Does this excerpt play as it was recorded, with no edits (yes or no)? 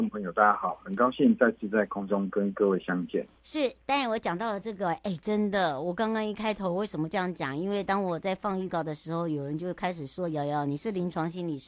yes